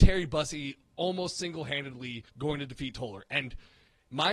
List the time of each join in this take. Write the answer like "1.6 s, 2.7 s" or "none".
2.3 s